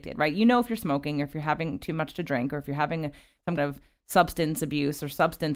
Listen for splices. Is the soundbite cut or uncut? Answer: cut